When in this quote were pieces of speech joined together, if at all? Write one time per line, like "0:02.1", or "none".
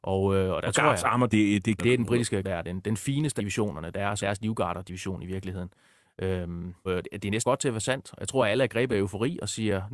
0:01.3
0:01.8
0:02.4
0:03.4
0:04.2
0:06.9
0:07.4
0:08.9